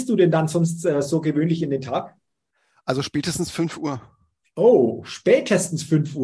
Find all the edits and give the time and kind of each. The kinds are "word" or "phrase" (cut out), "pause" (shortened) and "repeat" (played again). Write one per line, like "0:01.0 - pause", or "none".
none